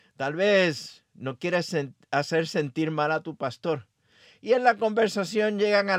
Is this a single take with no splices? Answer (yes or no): yes